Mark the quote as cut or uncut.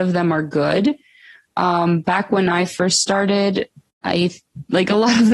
uncut